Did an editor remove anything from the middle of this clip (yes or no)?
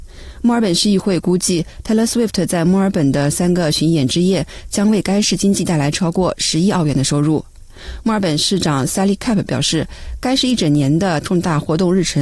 no